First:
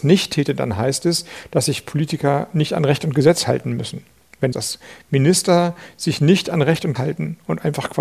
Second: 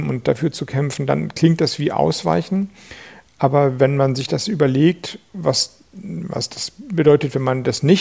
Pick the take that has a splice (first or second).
first